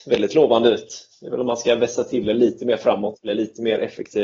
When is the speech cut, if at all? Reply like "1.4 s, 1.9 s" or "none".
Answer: none